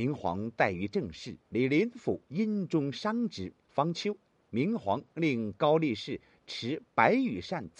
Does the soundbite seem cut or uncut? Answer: cut